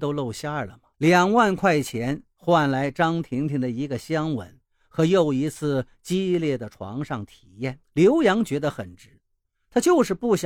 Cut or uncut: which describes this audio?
cut